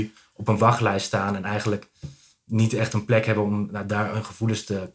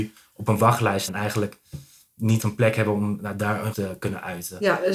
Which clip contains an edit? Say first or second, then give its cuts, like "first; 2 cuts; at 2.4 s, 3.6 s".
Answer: second; 3 cuts; at 1.1 s, 2.4 s, 3.7 s